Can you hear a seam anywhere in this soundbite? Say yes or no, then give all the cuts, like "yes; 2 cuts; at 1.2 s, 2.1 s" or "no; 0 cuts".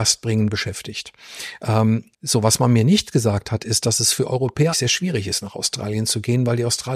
yes; 2 cuts; at 2.1 s, 4.7 s